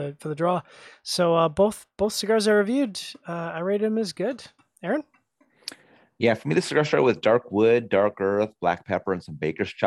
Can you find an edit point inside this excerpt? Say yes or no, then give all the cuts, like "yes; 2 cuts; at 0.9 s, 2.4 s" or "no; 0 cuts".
no; 0 cuts